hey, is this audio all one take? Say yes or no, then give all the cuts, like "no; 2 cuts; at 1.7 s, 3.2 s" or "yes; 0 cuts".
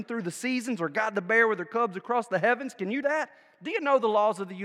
no; 1 cut; at 3.0 s